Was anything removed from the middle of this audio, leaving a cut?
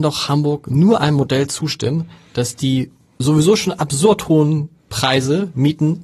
no; 0 cuts

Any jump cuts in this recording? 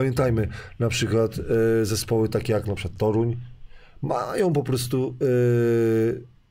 no; 0 cuts

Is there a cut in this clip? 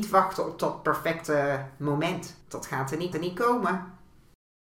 yes; 2 cuts; at 2.4 s, 3.1 s

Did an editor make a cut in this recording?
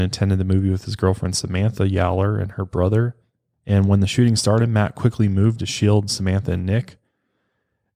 no; 0 cuts

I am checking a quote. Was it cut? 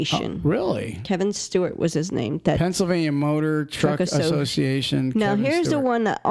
no; 0 cuts

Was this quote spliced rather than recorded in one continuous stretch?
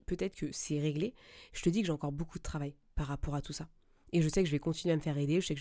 no; 0 cuts

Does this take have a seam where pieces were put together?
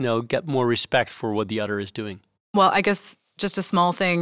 no; 0 cuts

